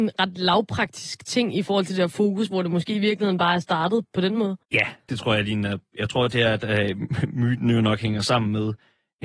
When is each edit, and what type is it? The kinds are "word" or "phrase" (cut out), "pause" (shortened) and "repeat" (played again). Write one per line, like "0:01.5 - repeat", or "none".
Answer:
0:04.6 - pause

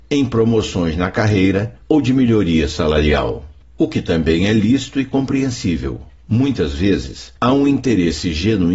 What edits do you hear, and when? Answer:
0:01.8 - pause
0:03.6 - pause
0:06.2 - pause
0:07.4 - pause

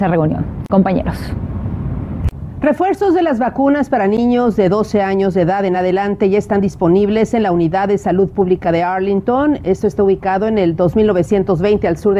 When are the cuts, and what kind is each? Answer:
none

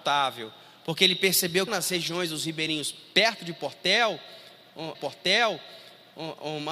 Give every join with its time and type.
0:01.7 - phrase
0:04.9 - repeat

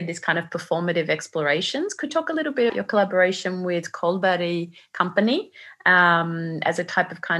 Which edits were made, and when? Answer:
0:02.1 - word
0:02.7 - word

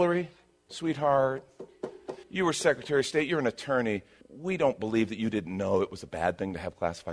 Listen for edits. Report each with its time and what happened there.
0:02.2 - pause
0:04.2 - pause

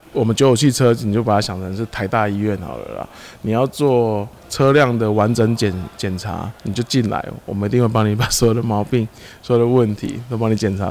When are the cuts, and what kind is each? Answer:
0:04.4 - pause
0:06.6 - pause

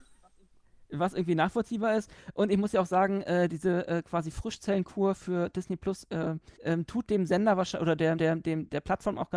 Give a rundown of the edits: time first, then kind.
0:06.6 - pause
0:08.2 - repeat

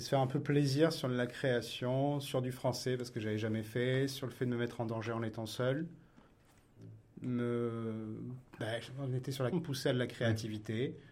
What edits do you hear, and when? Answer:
0:08.5 - pause
0:09.5 - word

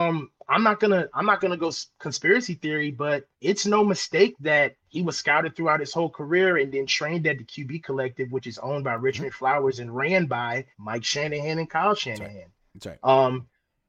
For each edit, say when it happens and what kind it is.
0:03.3 - pause
0:04.8 - pause
0:10.7 - pause

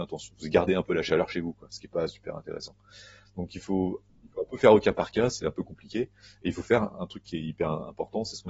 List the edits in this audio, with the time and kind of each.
none

